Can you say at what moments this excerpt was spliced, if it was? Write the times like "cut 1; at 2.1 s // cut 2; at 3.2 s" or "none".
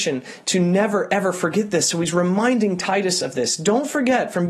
none